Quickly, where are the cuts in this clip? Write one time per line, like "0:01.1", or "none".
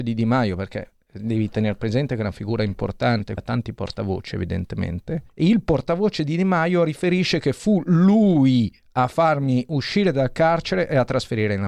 0:03.4
0:05.3